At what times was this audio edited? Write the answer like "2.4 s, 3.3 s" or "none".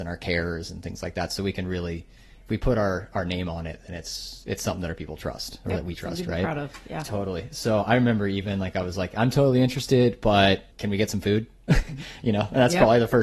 10.7 s

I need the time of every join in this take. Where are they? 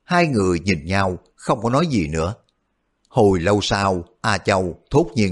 none

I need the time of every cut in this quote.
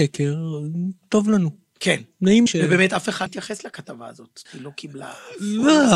2.5 s, 3.3 s, 4.5 s

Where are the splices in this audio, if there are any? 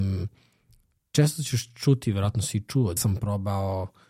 3.0 s

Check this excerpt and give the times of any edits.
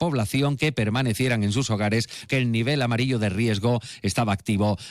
2.3 s

